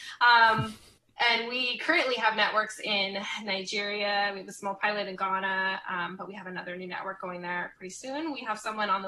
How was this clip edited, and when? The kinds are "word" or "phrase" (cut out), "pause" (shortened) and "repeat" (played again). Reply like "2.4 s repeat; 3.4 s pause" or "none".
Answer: none